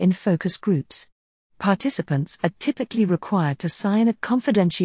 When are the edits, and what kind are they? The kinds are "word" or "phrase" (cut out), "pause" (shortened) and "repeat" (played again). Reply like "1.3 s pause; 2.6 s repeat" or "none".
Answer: none